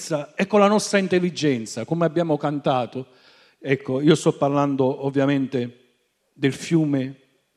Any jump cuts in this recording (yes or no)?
no